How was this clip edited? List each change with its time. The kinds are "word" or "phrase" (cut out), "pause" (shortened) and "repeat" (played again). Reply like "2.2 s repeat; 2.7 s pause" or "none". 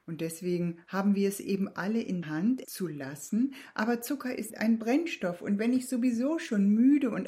2.2 s word; 2.6 s word; 4.5 s word